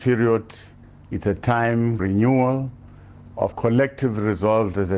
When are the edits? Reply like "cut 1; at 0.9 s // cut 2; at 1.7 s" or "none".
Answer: cut 1; at 2.0 s // cut 2; at 3.5 s